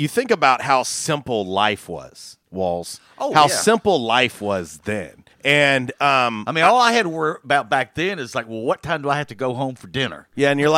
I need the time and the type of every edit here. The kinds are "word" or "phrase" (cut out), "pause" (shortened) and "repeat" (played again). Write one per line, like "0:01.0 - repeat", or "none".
0:02.4 - pause
0:05.3 - pause